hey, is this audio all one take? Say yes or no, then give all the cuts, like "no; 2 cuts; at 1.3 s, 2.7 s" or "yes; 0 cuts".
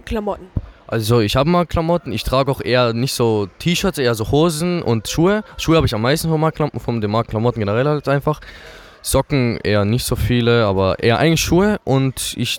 yes; 0 cuts